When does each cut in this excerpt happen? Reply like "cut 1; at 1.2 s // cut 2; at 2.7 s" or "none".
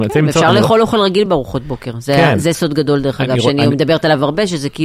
none